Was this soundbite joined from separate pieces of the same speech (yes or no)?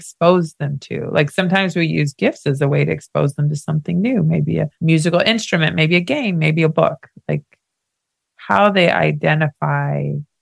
yes